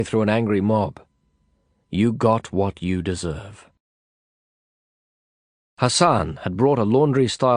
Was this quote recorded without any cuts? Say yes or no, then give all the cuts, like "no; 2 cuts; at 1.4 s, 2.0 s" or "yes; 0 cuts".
yes; 0 cuts